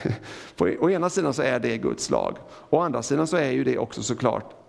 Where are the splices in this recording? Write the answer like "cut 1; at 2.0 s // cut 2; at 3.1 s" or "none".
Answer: none